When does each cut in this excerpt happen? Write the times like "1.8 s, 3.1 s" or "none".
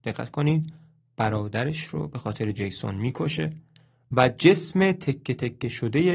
none